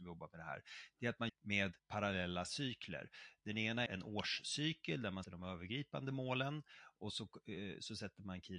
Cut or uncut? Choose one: cut